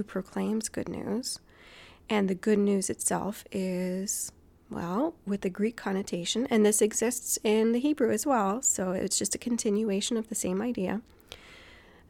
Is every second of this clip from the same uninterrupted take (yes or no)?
yes